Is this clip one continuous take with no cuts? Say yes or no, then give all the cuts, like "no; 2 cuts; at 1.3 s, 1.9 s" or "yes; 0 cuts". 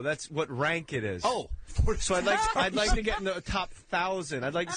yes; 0 cuts